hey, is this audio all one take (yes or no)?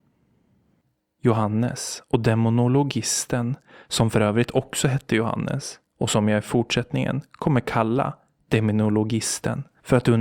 yes